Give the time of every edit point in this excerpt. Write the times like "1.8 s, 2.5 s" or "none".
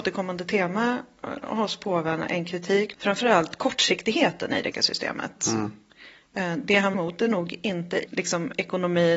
2.9 s, 4.7 s, 6.9 s, 8.1 s